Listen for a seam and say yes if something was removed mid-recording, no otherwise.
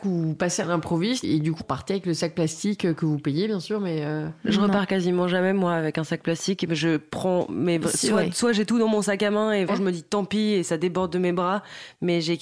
yes